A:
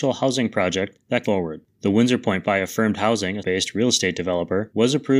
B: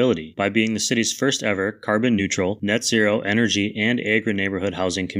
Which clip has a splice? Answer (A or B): A